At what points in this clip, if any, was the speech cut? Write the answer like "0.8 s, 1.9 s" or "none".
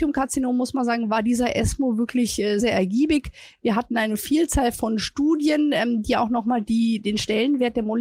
2.6 s